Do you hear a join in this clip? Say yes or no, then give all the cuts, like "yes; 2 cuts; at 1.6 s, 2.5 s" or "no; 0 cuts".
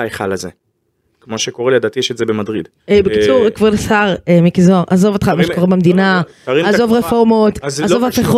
yes; 1 cut; at 2.8 s